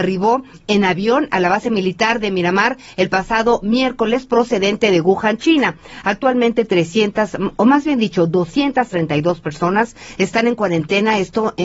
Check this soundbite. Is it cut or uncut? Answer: uncut